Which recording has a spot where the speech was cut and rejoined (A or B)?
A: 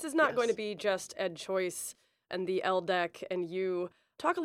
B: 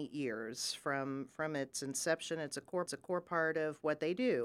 B